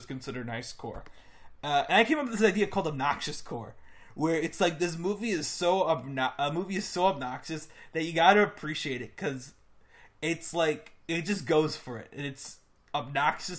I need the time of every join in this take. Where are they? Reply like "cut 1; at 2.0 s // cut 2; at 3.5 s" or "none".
none